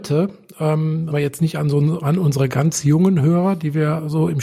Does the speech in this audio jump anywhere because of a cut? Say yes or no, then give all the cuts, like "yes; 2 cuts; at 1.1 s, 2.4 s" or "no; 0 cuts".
yes; 1 cut; at 1.1 s